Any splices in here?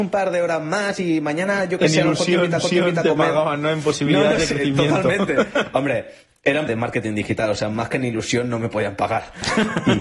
yes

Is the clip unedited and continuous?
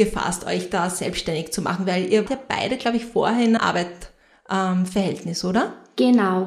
no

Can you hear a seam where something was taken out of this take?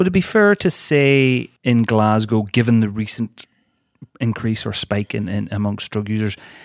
yes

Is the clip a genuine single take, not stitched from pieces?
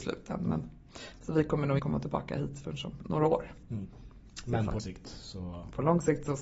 no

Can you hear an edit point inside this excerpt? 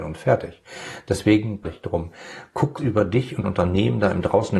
yes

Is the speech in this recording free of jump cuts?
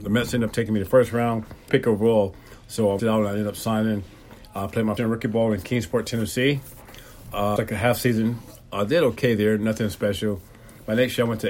no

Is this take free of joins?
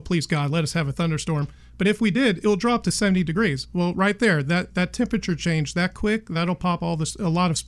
yes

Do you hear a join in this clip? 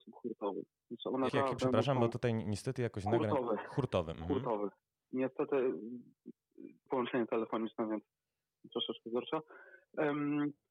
yes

